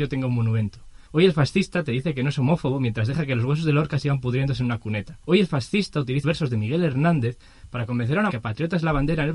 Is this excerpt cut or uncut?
cut